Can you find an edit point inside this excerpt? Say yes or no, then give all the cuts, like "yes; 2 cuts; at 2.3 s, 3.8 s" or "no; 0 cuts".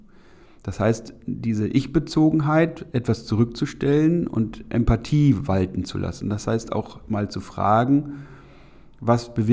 no; 0 cuts